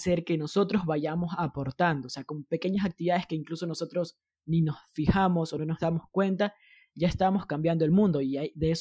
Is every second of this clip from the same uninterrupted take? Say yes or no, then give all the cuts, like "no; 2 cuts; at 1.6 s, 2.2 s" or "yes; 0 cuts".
yes; 0 cuts